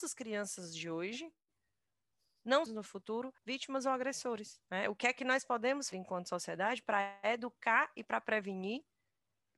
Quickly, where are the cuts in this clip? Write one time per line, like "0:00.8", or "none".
0:02.7
0:03.4
0:04.6
0:05.9